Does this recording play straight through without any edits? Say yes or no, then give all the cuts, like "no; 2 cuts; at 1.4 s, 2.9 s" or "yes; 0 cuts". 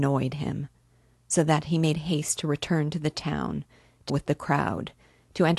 no; 1 cut; at 4.1 s